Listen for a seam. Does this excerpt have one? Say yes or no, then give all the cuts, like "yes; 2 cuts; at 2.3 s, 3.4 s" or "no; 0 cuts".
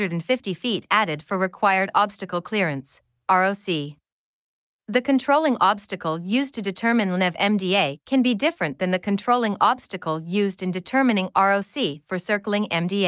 no; 0 cuts